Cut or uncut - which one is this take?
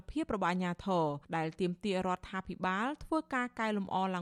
cut